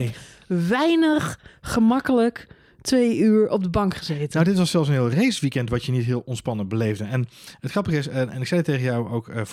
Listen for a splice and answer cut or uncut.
uncut